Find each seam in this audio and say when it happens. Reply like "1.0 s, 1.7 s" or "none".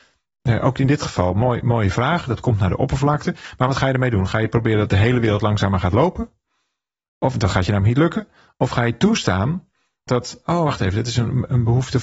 10.1 s